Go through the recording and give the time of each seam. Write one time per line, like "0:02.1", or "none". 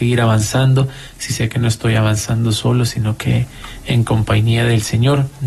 none

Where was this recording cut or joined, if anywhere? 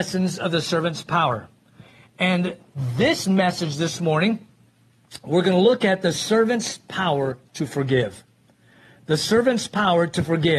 none

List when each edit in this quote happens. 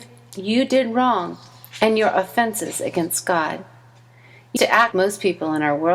0:04.6
0:04.9

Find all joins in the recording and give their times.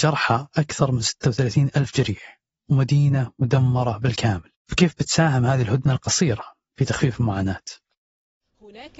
0:04.6

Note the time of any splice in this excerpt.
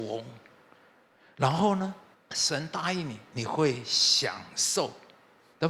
0:02.1

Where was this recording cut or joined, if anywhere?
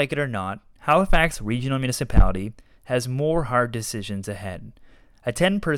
none

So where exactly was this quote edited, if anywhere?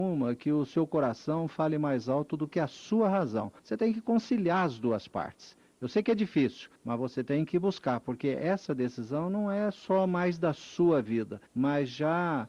0:03.6
0:06.8
0:11.5

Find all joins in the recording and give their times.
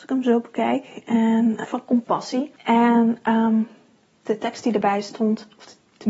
0:01.6
0:02.6
0:04.2

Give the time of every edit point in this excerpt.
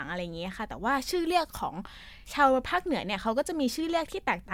0:02.2

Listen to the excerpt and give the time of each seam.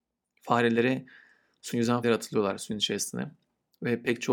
0:01.7
0:02.0

